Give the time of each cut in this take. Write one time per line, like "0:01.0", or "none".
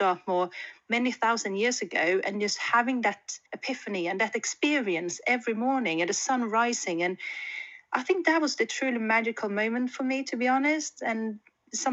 0:03.5

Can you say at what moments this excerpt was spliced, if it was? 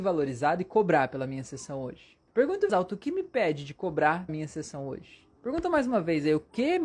0:02.3
0:02.7
0:04.3
0:05.4

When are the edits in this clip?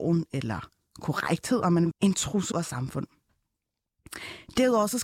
0:01.9
0:02.5

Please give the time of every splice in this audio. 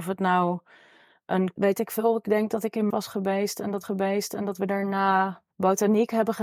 0:01.6
0:02.9
0:03.8
0:05.5

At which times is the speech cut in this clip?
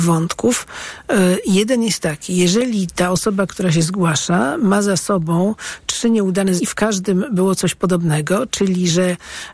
0:06.6

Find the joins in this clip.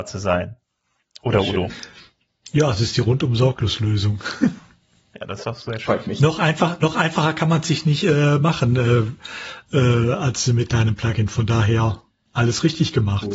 none

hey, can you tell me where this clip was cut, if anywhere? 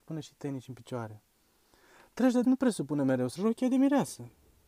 0:02.4
0:03.4

